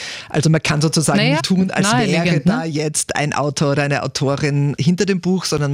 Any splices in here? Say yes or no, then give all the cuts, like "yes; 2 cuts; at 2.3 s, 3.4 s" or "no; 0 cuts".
yes; 2 cuts; at 1.4 s, 4.8 s